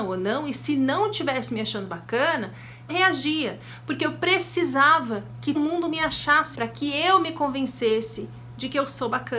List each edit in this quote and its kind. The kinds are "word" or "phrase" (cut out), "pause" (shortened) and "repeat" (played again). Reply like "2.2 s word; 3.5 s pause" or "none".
2.9 s word; 5.5 s word; 6.5 s word